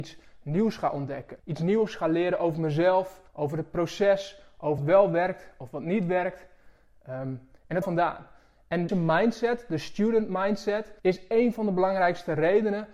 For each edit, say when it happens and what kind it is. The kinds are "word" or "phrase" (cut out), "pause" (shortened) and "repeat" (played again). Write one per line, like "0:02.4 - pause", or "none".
0:01.4 - pause
0:03.3 - pause
0:04.8 - word
0:07.8 - phrase
0:08.9 - word
0:11.0 - pause